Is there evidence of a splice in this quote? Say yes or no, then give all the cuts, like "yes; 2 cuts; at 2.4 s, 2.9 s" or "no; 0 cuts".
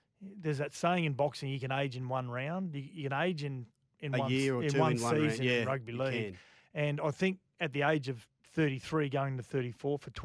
no; 0 cuts